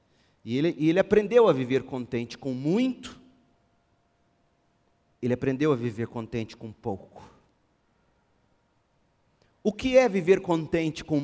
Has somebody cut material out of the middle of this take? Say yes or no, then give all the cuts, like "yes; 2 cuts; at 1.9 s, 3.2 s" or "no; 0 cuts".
no; 0 cuts